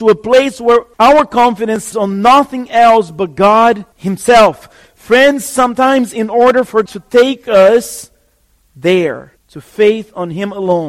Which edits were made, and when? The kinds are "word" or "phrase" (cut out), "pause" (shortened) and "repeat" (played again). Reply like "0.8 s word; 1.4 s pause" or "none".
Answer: 0.9 s pause; 1.9 s word; 3.9 s pause; 6.9 s word; 9.4 s pause